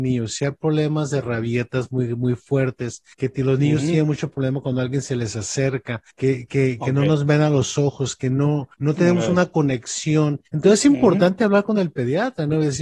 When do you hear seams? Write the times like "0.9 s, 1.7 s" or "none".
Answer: 3.1 s, 6.1 s, 8.7 s, 10.5 s